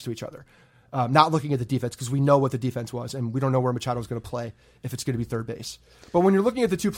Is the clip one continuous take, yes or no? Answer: yes